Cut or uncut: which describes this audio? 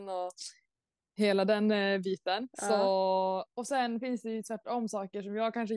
cut